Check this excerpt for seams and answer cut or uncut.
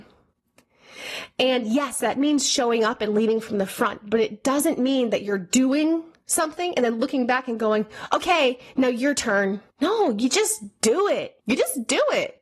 cut